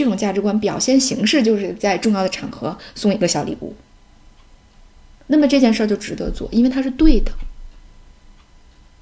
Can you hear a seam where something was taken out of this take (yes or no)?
no